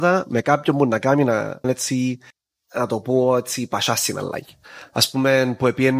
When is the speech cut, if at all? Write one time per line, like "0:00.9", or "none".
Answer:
0:01.6
0:02.3